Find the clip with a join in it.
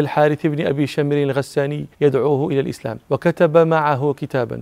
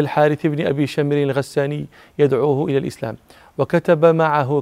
first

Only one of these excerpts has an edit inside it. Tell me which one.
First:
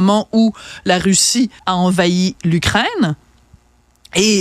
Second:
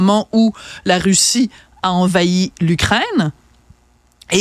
first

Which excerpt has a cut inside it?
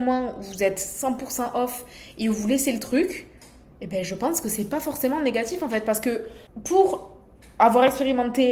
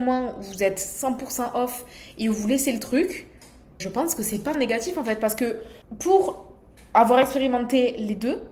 second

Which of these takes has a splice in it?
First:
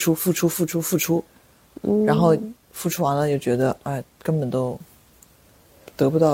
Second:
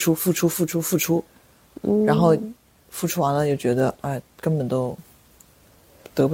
first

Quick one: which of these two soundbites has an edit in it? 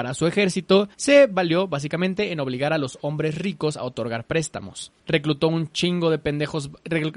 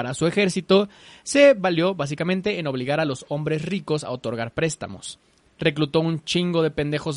first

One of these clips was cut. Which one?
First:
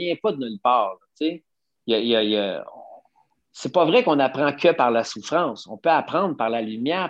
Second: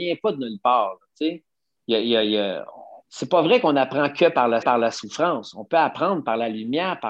second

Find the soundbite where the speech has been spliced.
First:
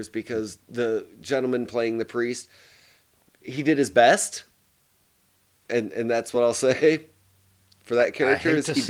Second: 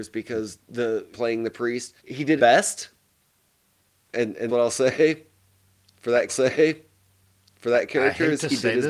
second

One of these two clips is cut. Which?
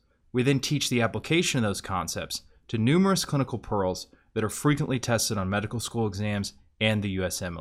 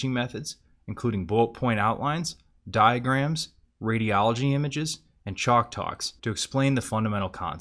second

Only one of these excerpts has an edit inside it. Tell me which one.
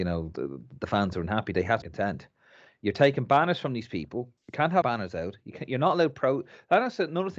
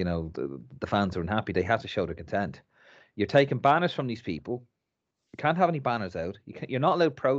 first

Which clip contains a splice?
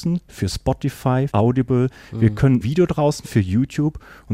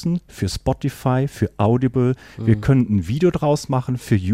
first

